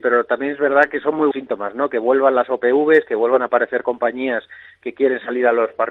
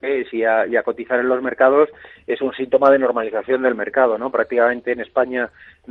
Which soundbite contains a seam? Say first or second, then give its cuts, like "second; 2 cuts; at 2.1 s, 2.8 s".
first; 1 cut; at 1.3 s